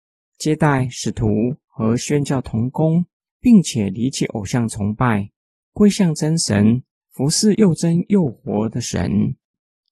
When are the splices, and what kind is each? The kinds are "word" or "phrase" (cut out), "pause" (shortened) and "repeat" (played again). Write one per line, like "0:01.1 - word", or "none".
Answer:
none